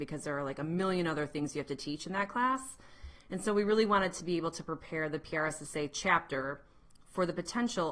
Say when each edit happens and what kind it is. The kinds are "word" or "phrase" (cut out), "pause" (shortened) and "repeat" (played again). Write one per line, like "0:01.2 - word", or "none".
none

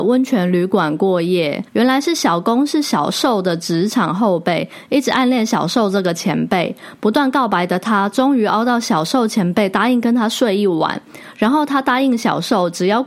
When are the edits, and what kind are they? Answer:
0:01.7 - pause

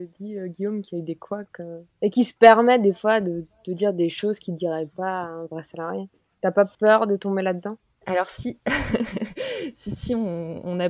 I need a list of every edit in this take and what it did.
none

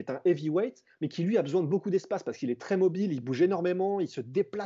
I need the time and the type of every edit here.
none

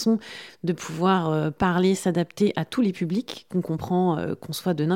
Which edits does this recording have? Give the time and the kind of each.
none

